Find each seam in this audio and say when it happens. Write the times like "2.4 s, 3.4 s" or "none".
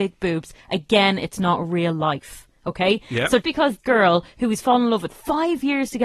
3.4 s, 3.8 s